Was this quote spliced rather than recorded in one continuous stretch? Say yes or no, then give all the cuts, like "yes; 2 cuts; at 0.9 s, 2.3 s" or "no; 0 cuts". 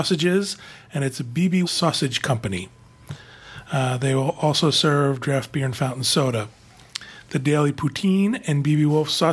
yes; 1 cut; at 1.6 s